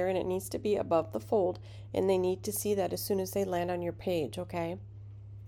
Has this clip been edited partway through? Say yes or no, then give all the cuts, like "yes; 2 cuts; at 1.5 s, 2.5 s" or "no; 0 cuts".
no; 0 cuts